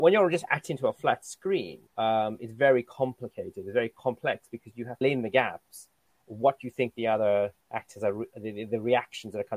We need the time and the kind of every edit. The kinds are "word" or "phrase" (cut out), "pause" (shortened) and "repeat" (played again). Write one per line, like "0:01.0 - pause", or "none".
0:01.9 - pause
0:05.0 - phrase
0:07.6 - pause